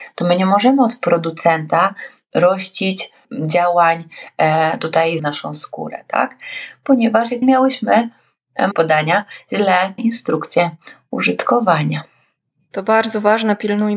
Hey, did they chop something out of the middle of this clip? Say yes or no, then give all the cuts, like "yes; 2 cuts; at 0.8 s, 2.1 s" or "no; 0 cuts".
yes; 4 cuts; at 5.2 s, 7.4 s, 8.7 s, 10.0 s